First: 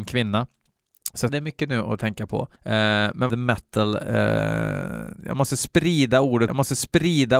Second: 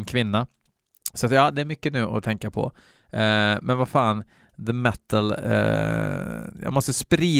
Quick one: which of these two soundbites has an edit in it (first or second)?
first